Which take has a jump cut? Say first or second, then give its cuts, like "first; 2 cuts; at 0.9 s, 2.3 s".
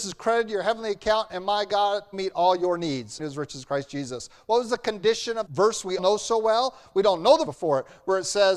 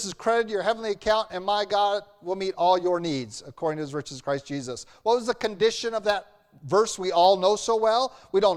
first; 5 cuts; at 2.1 s, 3.2 s, 5.5 s, 6.0 s, 7.5 s